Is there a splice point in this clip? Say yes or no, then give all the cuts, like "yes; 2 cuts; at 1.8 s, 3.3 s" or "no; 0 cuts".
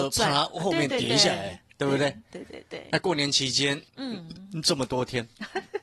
yes; 1 cut; at 3.9 s